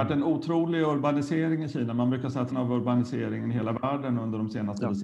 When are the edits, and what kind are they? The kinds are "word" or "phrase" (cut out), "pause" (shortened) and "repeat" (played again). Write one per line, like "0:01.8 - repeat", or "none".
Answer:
0:02.5 - word

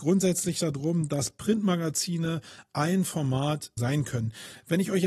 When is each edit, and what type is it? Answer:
0:03.8 - phrase

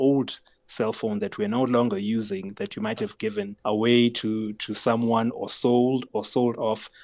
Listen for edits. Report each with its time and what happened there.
0:03.6 - pause

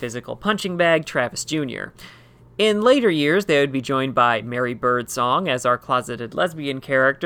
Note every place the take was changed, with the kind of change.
none

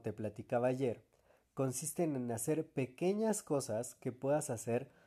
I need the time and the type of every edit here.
none

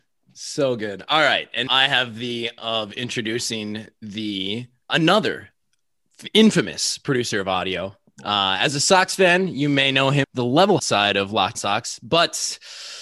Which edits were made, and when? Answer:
0:01.7 - word
0:02.6 - word
0:04.9 - word
0:10.2 - word
0:10.8 - word
0:11.5 - word

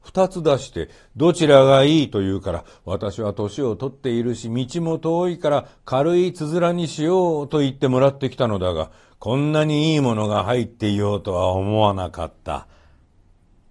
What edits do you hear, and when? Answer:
none

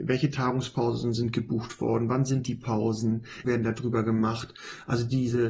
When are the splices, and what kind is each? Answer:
0:03.4 - word

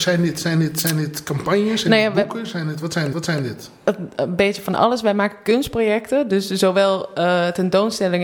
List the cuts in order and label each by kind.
0:03.1 - repeat

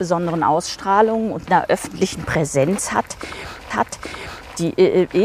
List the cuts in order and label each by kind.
0:01.5 - word
0:03.7 - repeat

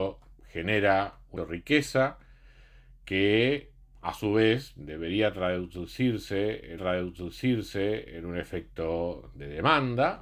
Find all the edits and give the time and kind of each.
0:01.4 - word
0:06.8 - repeat

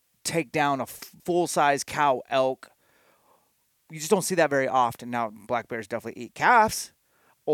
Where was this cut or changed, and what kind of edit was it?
0:01.2 - pause

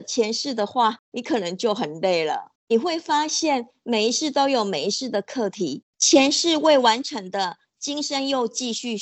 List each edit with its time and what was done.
0:02.6 - pause
0:05.9 - pause

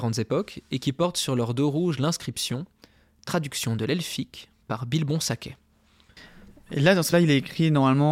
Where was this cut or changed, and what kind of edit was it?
0:07.1 - word

